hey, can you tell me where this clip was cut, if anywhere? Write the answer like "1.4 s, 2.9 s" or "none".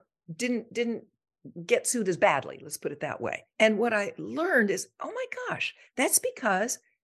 3.5 s